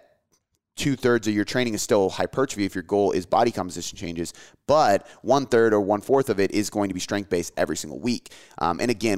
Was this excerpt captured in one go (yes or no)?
yes